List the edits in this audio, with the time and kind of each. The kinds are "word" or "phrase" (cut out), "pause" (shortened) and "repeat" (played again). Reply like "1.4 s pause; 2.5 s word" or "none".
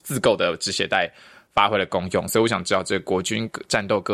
none

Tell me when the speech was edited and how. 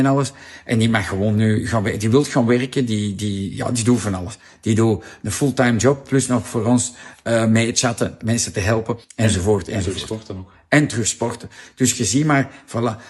9.0 s pause

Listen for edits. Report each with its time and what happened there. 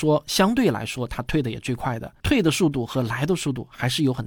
2.2 s pause

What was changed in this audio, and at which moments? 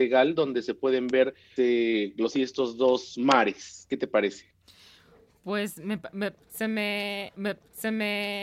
1.6 s word; 2.3 s word; 7.3 s repeat

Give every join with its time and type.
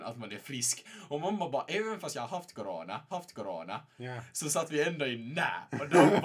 3.1 s repeat

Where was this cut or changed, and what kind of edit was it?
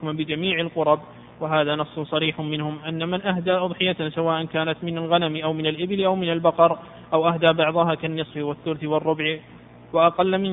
none

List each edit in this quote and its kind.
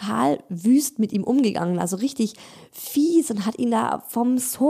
none

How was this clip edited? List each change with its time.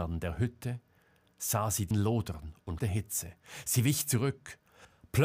1.9 s word; 2.8 s word

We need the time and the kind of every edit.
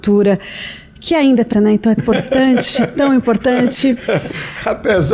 1.5 s word; 2.0 s word

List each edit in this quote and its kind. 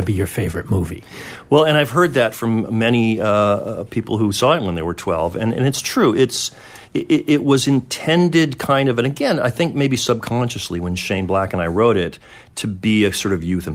6.9 s pause

